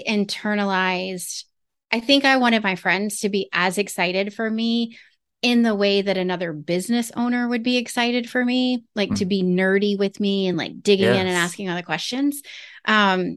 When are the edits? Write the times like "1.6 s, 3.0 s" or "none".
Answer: none